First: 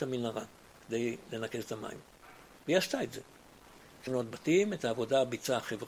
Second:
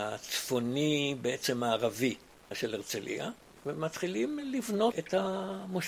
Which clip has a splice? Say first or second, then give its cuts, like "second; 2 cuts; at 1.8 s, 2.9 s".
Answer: first; 1 cut; at 4.1 s